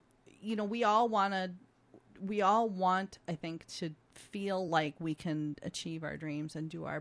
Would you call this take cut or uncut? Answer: uncut